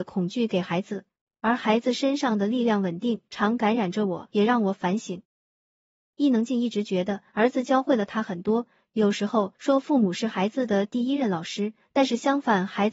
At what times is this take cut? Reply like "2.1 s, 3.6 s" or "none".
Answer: none